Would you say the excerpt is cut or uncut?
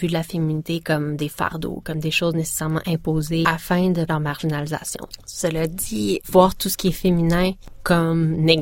cut